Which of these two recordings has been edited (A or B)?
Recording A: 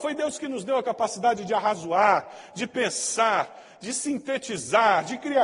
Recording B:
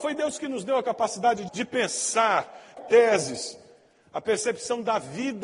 B